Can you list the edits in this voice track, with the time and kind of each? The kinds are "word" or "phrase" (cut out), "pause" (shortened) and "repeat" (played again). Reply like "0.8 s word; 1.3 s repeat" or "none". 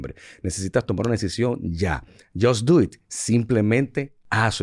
none